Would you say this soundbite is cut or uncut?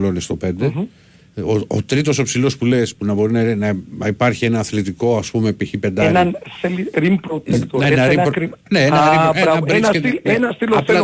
uncut